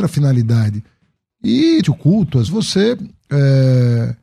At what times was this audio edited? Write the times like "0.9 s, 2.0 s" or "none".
1.8 s, 2.5 s